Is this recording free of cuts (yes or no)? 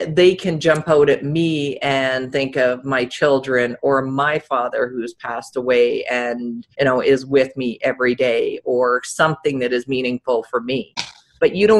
no